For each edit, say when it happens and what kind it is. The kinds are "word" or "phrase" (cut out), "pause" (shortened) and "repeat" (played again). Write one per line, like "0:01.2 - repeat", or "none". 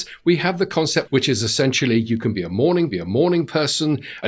0:01.1 - phrase
0:02.9 - repeat